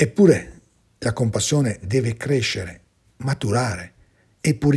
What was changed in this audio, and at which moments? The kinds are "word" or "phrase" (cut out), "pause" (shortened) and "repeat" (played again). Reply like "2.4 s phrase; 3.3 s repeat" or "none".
1.8 s word